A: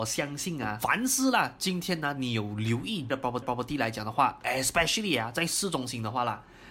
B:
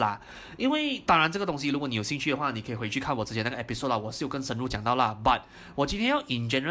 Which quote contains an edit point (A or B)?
A